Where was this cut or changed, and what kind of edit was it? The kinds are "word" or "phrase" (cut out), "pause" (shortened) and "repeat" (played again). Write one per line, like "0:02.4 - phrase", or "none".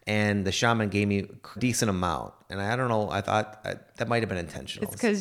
0:01.6 - phrase